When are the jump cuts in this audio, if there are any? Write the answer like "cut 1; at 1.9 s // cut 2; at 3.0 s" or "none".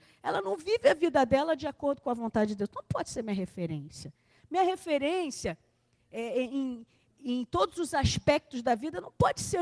none